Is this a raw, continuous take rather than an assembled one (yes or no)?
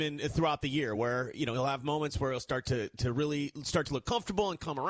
yes